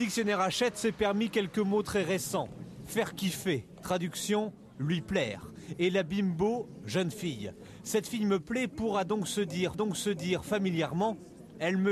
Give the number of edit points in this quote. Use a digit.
1